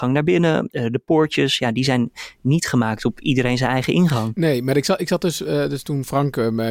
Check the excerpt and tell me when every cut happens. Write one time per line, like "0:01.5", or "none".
none